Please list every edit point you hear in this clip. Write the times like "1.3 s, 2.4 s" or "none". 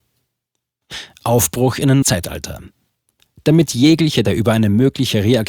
2.0 s, 4.2 s